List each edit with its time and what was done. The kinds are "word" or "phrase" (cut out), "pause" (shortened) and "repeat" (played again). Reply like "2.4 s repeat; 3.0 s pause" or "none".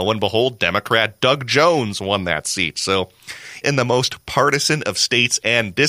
3.6 s word